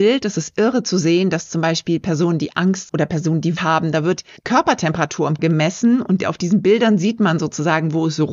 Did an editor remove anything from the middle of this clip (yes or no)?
yes